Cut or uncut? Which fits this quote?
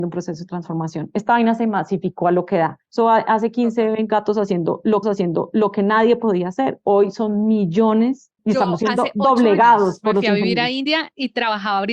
cut